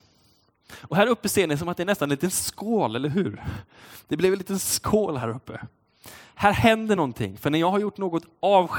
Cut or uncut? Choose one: uncut